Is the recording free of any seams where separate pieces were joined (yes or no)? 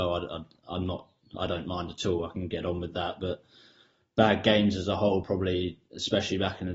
yes